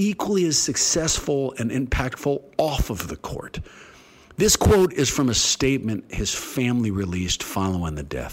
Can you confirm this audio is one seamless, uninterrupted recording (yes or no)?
yes